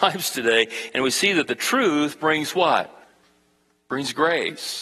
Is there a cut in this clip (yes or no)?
no